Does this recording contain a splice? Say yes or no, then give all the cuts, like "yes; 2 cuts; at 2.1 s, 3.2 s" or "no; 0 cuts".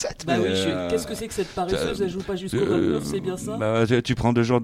no; 0 cuts